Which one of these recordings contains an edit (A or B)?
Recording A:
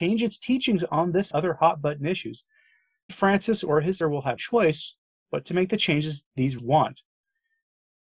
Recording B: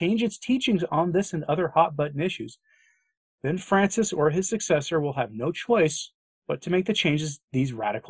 A